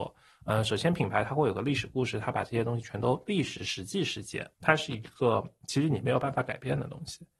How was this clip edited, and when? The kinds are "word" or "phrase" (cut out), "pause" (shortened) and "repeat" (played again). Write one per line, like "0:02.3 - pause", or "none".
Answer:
0:04.5 - pause